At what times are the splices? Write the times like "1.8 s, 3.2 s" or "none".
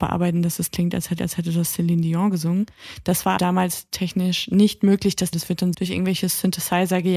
1.2 s, 3.4 s, 5.3 s, 5.7 s